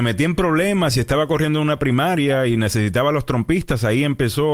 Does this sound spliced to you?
no; 0 cuts

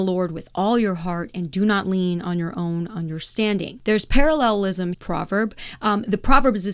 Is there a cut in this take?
yes; 1 cut; at 4.9 s

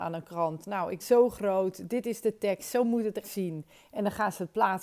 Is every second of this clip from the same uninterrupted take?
no; 2 cuts; at 1.0 s, 3.2 s

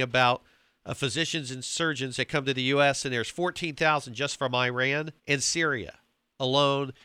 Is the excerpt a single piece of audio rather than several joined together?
no; 1 cut; at 5.2 s

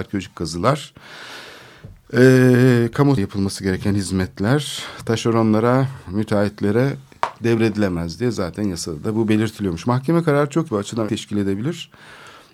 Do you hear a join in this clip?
yes; 3 cuts; at 3.2 s, 10.7 s, 11.1 s

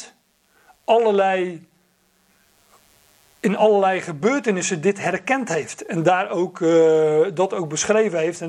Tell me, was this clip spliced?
no; 0 cuts

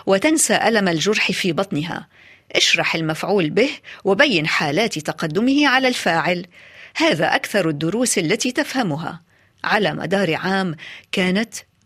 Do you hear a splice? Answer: no; 0 cuts

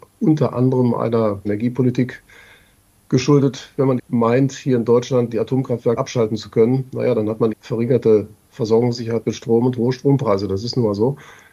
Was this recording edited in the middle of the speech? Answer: yes; 4 cuts; at 1.4 s, 4.0 s, 6.0 s, 7.5 s

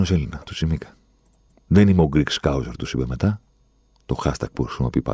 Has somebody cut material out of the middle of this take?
no; 0 cuts

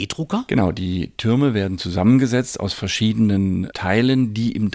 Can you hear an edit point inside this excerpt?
no; 0 cuts

